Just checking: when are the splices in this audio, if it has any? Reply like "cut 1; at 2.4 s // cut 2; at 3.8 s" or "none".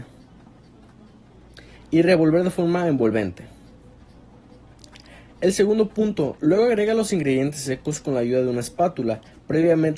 none

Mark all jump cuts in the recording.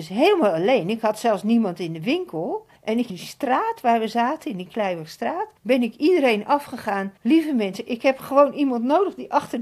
cut 1; at 2.8 s // cut 2; at 3.1 s // cut 3; at 5.6 s // cut 4; at 7.2 s

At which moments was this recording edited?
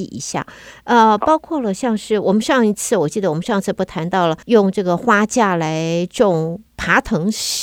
cut 1; at 4.4 s // cut 2; at 6.7 s

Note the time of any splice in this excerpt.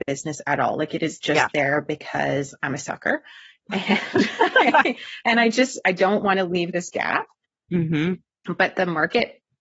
cut 1; at 1.2 s

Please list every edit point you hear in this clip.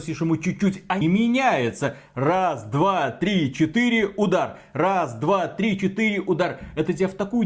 cut 1; at 1.0 s

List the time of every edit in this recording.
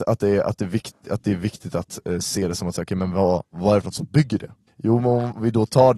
cut 1; at 4.7 s

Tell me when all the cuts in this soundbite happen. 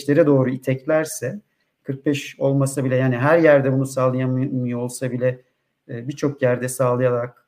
none

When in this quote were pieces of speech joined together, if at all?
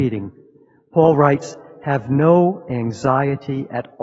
none

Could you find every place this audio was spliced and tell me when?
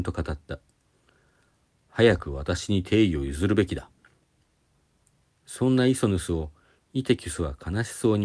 none

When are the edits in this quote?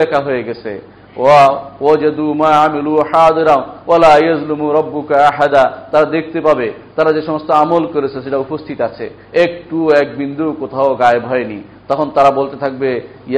none

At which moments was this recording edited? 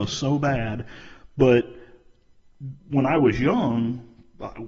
cut 1; at 2.8 s

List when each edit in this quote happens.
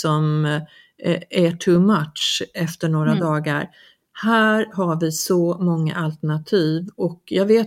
none

